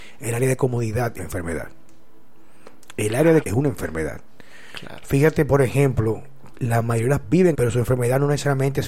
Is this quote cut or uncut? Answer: cut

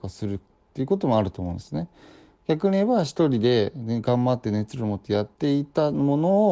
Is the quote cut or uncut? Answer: cut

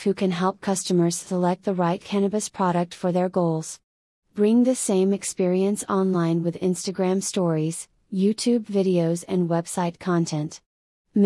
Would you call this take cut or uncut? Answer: uncut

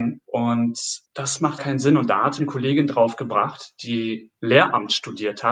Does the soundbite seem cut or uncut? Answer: cut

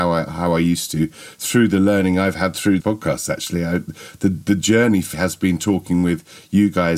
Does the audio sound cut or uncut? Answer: cut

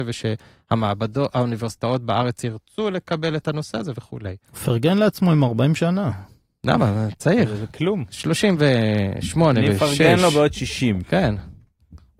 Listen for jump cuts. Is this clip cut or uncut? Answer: uncut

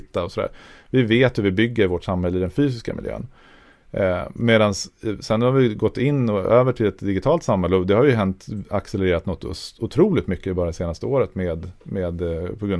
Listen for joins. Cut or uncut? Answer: uncut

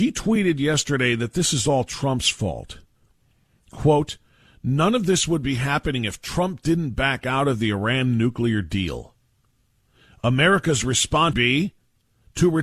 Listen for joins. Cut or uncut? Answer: cut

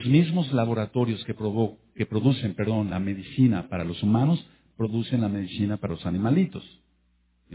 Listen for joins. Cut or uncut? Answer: uncut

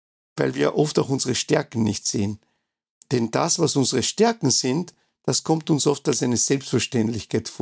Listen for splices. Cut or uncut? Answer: uncut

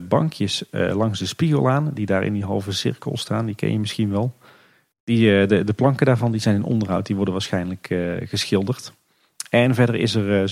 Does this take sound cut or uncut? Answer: uncut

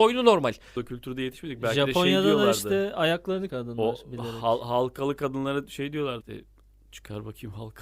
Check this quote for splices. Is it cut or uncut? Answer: cut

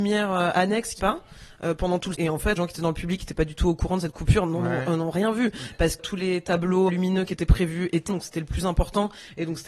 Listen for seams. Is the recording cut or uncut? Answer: cut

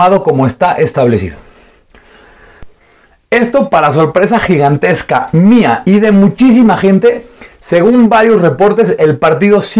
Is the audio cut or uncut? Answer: uncut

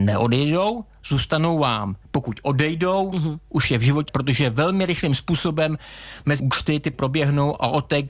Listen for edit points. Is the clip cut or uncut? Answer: cut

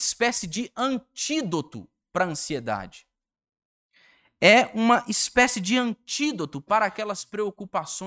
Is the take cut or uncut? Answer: uncut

